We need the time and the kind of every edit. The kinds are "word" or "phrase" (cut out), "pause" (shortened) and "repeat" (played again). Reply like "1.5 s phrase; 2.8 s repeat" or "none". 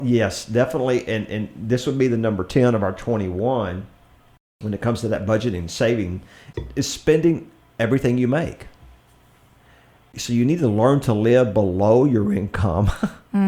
none